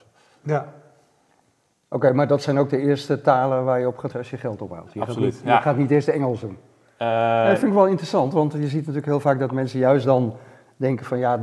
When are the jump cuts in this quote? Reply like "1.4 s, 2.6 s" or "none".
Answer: 4.1 s